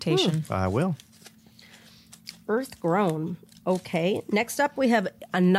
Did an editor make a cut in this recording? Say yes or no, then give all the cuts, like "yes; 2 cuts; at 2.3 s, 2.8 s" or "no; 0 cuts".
no; 0 cuts